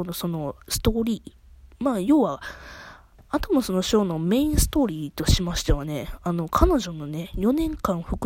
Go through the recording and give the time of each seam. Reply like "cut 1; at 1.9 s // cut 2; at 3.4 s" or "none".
none